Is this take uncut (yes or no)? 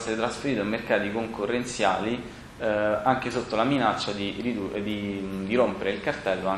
yes